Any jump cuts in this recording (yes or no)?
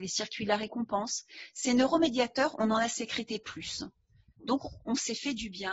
no